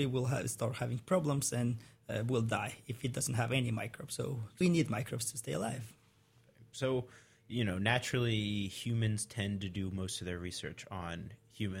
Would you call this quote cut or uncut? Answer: cut